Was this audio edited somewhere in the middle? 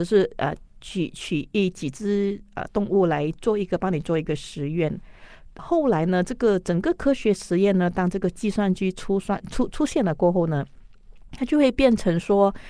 yes; 1 cut; at 5.6 s

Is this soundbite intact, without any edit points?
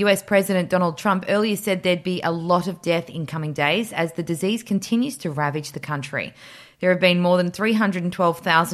yes; 0 cuts

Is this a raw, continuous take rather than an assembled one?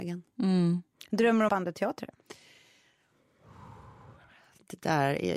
no; 1 cut; at 1.5 s

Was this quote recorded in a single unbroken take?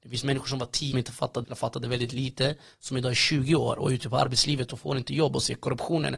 no; 2 cuts; at 0.9 s, 1.4 s

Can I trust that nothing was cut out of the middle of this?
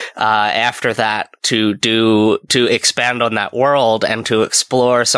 yes; 0 cuts

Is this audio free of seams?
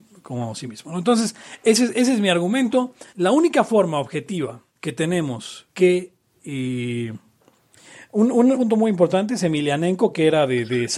no; 4 cuts; at 3.1 s, 4.7 s, 5.7 s, 8.5 s

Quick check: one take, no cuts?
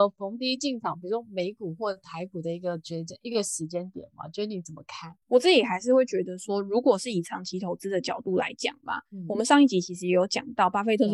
no; 1 cut; at 5.2 s

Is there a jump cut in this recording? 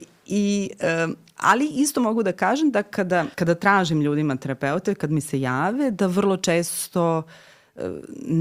yes; 1 cut; at 3.3 s

